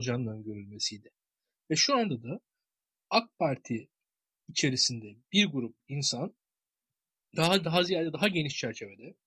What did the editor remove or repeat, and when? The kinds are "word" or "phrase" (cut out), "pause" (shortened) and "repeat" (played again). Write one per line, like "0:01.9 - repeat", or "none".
none